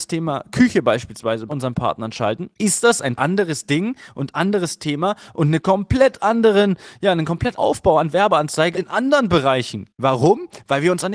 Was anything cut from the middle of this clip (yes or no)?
yes